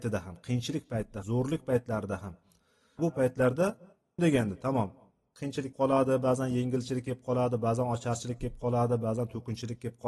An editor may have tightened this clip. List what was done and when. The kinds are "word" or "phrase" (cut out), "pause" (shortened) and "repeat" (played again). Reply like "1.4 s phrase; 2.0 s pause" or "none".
1.2 s word; 3.0 s word; 4.2 s phrase; 5.7 s word